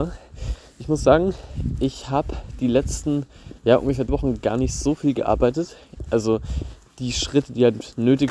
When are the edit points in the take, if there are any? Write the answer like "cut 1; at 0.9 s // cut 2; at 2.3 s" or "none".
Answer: cut 1; at 3.6 s // cut 2; at 4.1 s